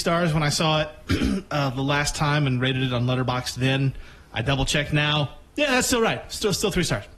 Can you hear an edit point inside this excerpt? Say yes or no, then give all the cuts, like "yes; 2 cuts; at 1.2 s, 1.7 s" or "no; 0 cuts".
no; 0 cuts